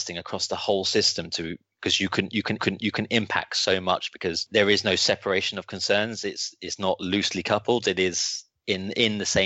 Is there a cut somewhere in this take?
yes; 1 cut; at 2.6 s

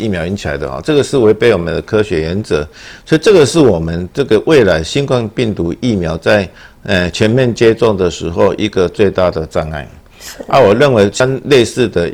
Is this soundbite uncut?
yes; 0 cuts

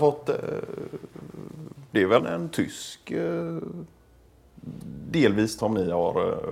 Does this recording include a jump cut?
yes; 2 cuts; at 2.2 s, 5.6 s

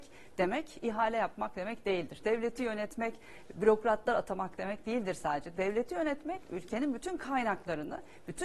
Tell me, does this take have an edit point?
no; 0 cuts

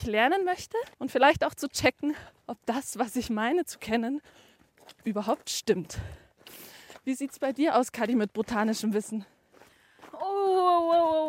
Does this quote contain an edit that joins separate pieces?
yes; 2 cuts; at 0.9 s, 2.4 s

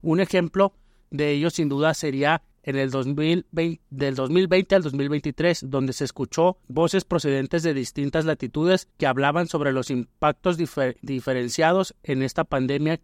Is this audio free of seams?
no; 3 cuts; at 2.5 s, 6.6 s, 8.9 s

